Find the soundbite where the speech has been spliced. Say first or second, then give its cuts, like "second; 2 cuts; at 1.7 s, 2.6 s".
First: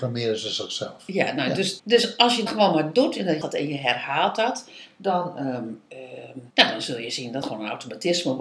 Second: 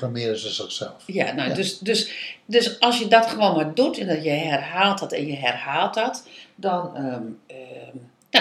first; 5 cuts; at 1.8 s, 2.5 s, 3.4 s, 6.5 s, 7.4 s